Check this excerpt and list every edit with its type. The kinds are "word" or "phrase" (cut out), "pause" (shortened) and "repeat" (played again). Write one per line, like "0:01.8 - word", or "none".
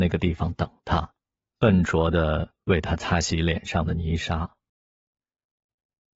none